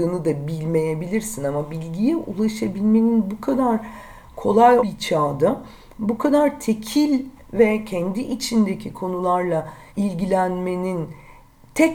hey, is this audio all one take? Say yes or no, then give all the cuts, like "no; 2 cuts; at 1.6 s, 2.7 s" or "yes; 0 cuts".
no; 2 cuts; at 4.8 s, 9.9 s